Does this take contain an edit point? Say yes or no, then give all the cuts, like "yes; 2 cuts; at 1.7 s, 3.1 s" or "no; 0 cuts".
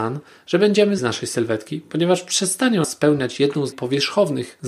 yes; 3 cuts; at 1.0 s, 2.8 s, 3.7 s